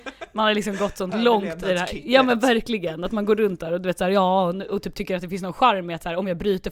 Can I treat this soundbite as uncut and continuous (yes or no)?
yes